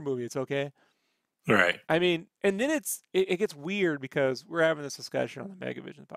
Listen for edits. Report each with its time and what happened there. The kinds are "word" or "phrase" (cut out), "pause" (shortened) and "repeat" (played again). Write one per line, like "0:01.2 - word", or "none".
0:01.8 - pause
0:02.3 - pause

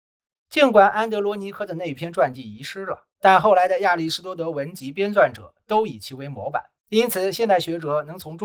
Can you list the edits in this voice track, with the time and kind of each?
0:03.1 - pause
0:06.8 - pause

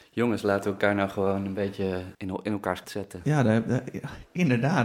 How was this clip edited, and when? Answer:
0:02.1 - pause
0:02.8 - word

